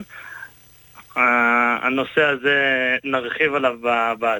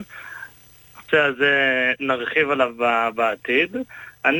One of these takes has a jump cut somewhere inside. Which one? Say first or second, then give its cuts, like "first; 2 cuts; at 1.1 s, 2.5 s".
second; 1 cut; at 1.1 s